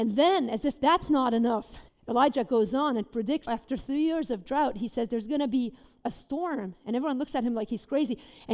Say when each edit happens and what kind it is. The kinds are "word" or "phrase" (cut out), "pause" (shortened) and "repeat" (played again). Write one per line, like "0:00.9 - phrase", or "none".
0:01.9 - pause
0:03.5 - word